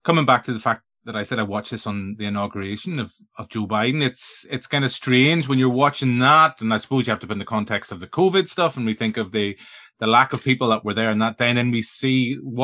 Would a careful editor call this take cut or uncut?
uncut